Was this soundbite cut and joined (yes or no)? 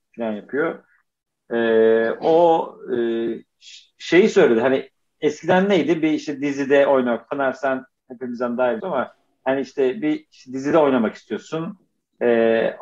yes